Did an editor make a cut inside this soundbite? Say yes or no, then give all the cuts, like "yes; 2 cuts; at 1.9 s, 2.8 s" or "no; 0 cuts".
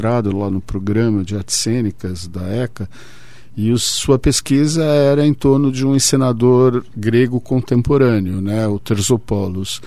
no; 0 cuts